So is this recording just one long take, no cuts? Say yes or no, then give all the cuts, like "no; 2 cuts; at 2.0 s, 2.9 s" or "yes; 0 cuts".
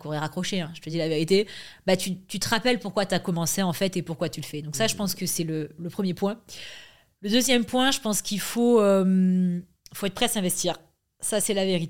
yes; 0 cuts